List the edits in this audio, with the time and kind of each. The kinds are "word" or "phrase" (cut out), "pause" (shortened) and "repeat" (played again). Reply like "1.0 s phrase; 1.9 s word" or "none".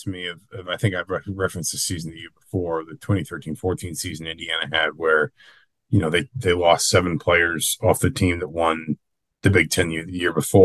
none